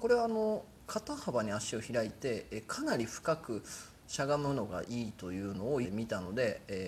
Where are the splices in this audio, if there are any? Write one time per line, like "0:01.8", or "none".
0:05.8